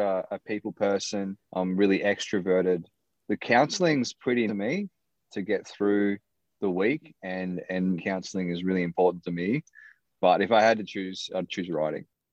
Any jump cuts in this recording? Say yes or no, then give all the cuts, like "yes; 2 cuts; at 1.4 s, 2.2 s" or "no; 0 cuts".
yes; 3 cuts; at 1.4 s, 4.5 s, 8.0 s